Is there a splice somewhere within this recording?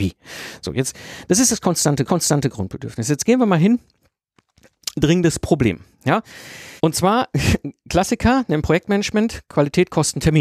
yes; 2 cuts; at 2.1 s, 6.8 s

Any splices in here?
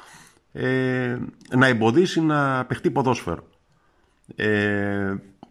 no; 0 cuts

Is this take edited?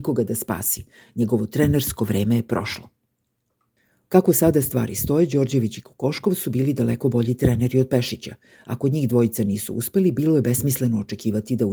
no; 0 cuts

